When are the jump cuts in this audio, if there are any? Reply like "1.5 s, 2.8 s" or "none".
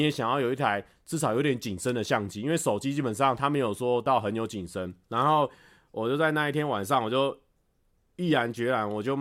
5.0 s